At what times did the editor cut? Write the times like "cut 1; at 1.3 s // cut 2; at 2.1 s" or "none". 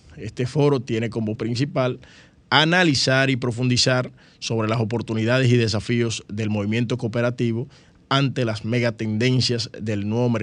cut 1; at 1.3 s